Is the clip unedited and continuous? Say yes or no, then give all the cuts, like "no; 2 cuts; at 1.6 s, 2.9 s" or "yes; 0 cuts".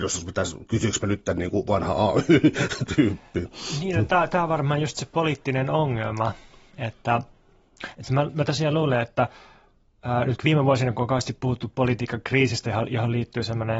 yes; 0 cuts